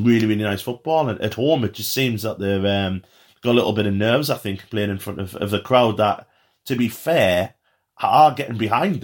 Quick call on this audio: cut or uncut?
uncut